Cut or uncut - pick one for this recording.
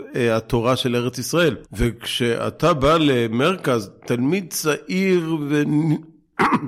cut